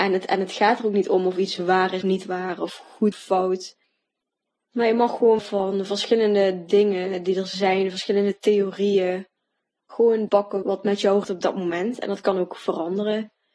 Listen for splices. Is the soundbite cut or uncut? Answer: cut